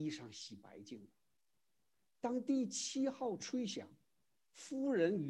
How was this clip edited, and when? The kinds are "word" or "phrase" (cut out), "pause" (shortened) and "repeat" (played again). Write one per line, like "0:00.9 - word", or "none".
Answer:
none